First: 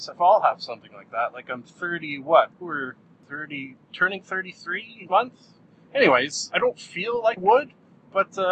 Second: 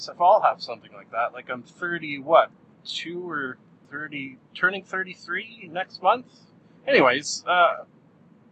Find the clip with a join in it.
first; 4 cuts; at 2.6 s, 5.1 s, 6.5 s, 7.4 s

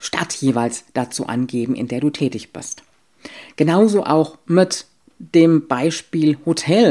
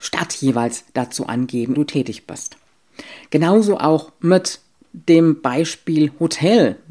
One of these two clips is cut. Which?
second; 1 cut; at 1.7 s

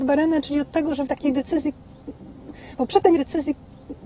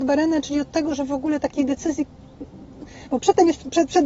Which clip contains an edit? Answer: first; 2 cuts; at 1.1 s, 3.2 s

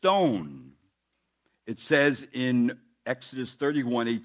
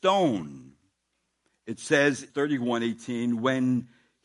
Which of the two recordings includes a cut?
second; 1 cut; at 2.3 s

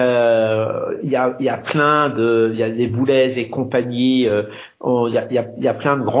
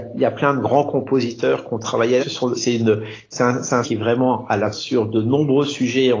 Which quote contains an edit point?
second; 4 cuts; at 2.2 s, 2.5 s, 3.8 s, 4.7 s

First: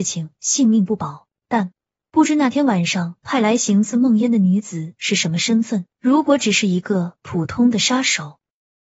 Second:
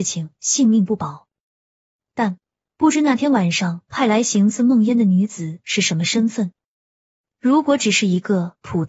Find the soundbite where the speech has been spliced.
first; 2 cuts; at 1.4 s, 5.9 s

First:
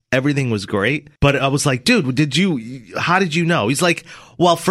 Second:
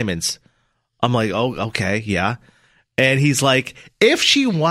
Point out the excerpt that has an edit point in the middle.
first; 1 cut; at 1.2 s

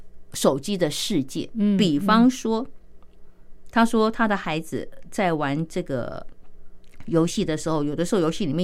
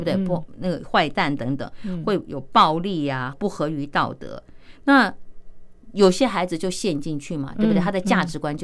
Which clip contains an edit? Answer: second; 1 cut; at 3.3 s

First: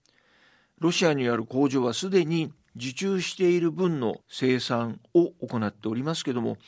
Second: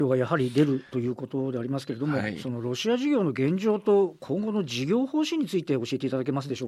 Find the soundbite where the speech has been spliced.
first; 1 cut; at 4.2 s

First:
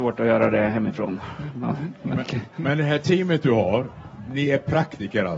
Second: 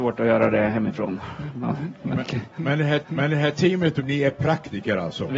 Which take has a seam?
second; 2 cuts; at 3.0 s, 4.0 s

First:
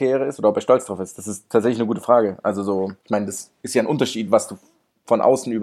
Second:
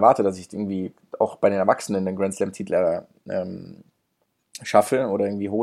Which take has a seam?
first; 1 cut; at 3.0 s

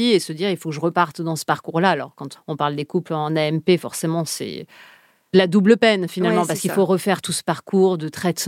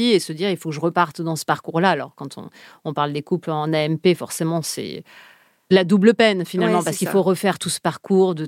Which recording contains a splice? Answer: first; 1 cut; at 2.4 s

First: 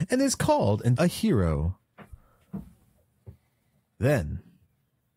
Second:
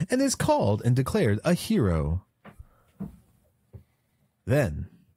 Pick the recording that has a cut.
first; 1 cut; at 1.0 s

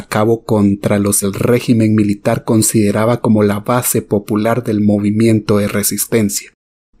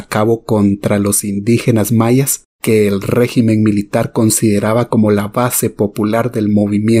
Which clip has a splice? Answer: first; 1 cut; at 1.2 s

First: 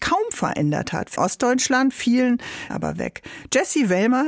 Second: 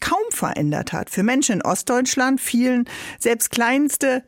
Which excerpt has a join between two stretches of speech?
first; 2 cuts; at 1.2 s, 2.7 s

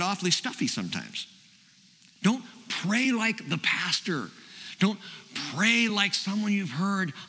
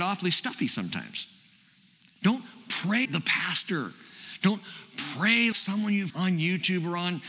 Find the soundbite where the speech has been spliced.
second; 3 cuts; at 3.0 s, 5.5 s, 6.1 s

